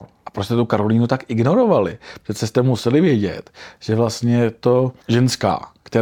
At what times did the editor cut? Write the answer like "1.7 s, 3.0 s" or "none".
5.0 s